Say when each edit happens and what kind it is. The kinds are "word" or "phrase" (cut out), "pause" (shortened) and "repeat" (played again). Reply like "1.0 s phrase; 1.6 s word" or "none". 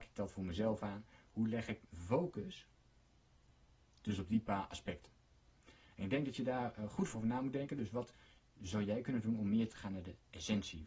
1.8 s word; 7.1 s word; 9.7 s word